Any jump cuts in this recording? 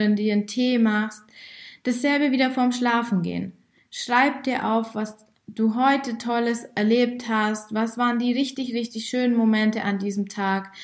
no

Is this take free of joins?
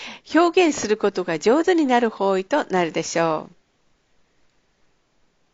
yes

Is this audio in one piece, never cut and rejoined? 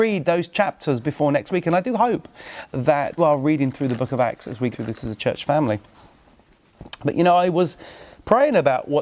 no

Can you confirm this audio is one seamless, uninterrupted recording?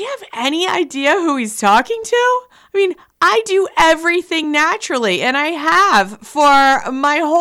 yes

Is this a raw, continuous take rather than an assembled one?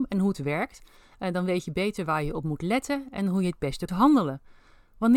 no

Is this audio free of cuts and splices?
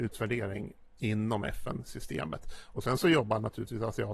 yes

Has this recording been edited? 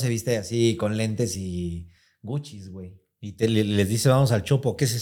no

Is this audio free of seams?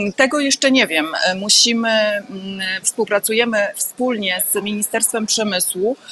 no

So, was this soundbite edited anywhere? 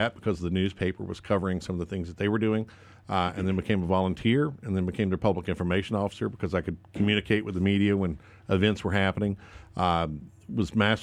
no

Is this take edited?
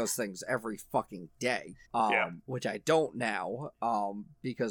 yes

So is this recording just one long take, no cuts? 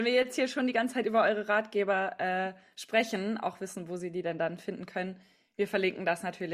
yes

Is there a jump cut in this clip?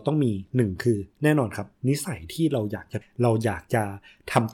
yes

